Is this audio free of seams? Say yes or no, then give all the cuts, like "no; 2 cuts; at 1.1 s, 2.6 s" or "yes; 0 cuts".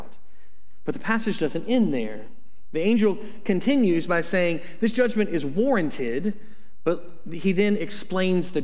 yes; 0 cuts